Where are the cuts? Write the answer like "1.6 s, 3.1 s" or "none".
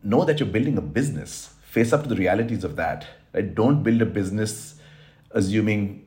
none